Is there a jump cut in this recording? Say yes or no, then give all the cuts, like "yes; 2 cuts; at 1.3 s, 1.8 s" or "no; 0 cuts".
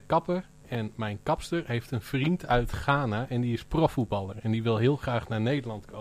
no; 0 cuts